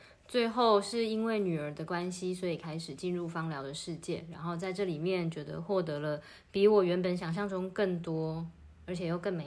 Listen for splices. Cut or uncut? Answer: uncut